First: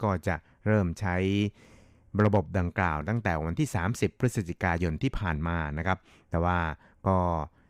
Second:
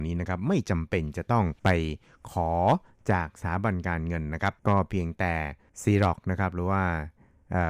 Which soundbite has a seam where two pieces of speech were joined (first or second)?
second